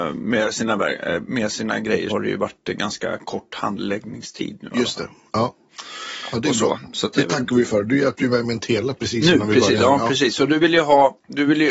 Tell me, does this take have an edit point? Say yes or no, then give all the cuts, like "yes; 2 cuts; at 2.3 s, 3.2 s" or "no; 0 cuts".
yes; 1 cut; at 2.1 s